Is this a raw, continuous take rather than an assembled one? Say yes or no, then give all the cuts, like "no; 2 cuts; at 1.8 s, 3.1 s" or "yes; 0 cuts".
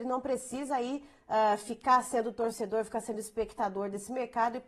yes; 0 cuts